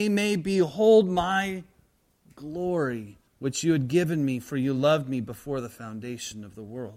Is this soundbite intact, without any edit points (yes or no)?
no